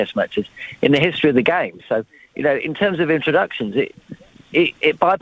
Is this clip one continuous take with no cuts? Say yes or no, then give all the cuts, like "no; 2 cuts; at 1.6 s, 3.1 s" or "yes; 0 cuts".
yes; 0 cuts